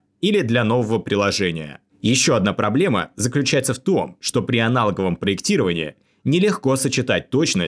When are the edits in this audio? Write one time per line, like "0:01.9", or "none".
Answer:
none